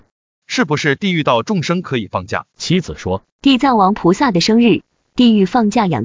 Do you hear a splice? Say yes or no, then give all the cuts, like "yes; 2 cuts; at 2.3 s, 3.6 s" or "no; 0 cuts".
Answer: yes; 2 cuts; at 2.5 s, 3.3 s